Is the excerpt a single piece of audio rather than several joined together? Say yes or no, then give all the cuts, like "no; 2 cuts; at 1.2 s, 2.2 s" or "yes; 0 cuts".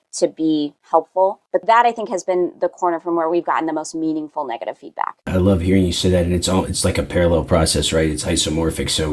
yes; 0 cuts